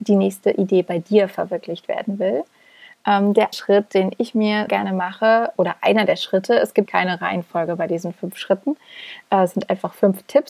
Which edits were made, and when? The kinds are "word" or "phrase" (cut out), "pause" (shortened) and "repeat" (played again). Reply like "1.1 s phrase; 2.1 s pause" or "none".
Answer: 3.5 s word; 4.7 s word; 5.6 s word; 6.9 s word